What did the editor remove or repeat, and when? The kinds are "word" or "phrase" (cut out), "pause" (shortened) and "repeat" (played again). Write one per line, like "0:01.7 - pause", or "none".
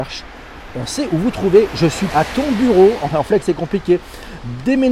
0:02.1 - word
0:03.1 - word
0:03.4 - word

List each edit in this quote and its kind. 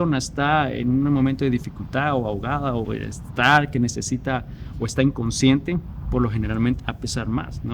0:02.8 - word
0:06.8 - word

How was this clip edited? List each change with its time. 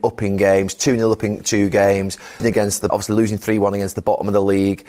0:02.4 - word
0:02.9 - word

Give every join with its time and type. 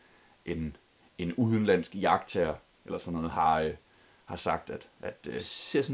none

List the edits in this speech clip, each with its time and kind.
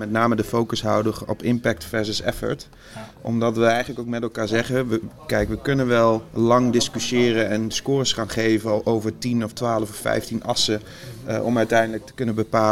none

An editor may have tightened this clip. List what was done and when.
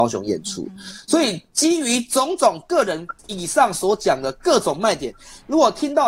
0:03.2 - pause

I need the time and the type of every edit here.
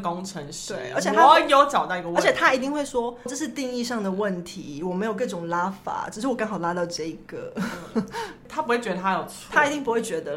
0:03.3 - word

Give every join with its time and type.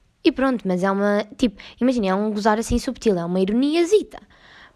none

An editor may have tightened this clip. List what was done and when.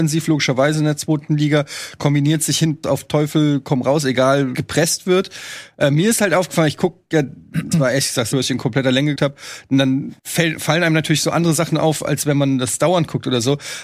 0:02.8 - word
0:04.5 - word
0:07.7 - word
0:08.3 - phrase
0:09.2 - word
0:10.2 - pause

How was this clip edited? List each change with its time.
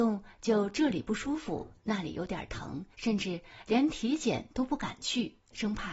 0:02.9 - pause

